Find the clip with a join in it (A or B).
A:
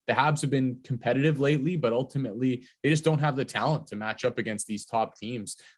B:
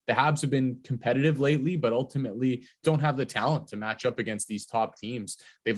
B